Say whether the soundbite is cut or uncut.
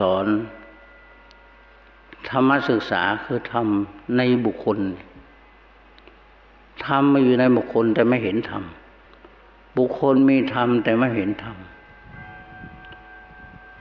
uncut